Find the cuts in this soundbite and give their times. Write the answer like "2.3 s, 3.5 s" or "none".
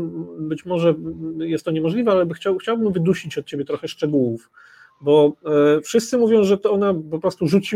none